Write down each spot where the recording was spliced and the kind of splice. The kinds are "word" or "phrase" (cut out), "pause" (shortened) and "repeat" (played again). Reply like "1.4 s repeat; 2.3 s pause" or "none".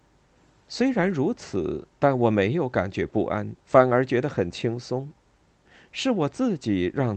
1.9 s pause; 3.6 s pause